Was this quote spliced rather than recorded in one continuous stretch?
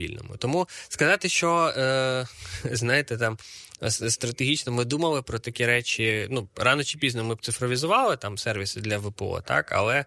no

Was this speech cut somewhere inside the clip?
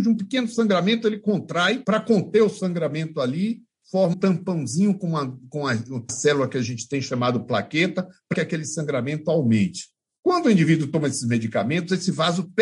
yes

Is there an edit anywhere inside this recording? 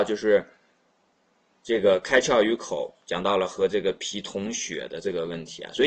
yes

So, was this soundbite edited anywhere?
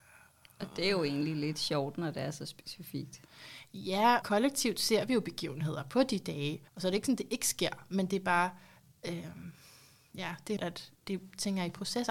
yes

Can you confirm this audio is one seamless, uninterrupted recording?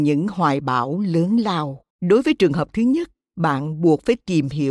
no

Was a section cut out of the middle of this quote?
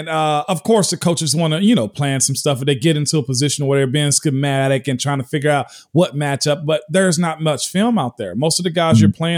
no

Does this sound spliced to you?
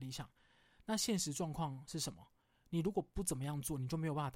no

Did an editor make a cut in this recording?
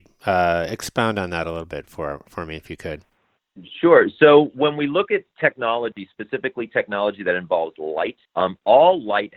yes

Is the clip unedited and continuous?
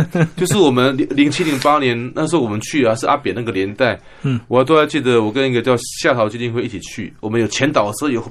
yes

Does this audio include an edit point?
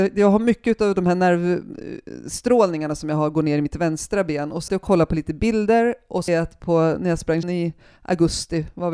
yes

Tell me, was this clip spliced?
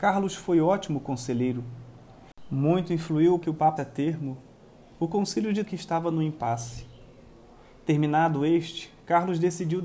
yes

